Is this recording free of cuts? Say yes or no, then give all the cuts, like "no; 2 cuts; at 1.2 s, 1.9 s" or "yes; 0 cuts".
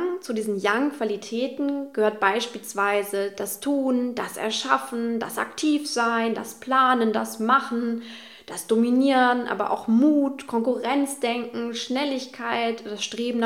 yes; 0 cuts